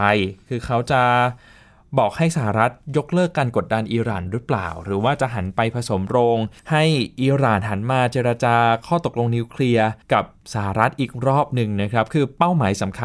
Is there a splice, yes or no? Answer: yes